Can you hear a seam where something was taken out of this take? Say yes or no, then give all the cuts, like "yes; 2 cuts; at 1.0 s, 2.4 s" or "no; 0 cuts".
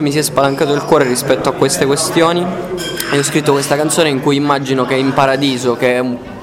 no; 0 cuts